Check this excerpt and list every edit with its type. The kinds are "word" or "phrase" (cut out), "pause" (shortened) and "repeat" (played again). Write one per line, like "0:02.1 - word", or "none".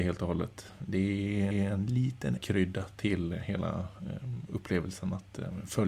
0:01.5 - repeat
0:02.4 - word